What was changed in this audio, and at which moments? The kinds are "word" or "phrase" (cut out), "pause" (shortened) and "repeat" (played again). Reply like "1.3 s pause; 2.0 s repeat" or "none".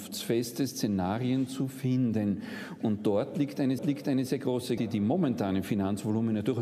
3.8 s repeat; 4.8 s word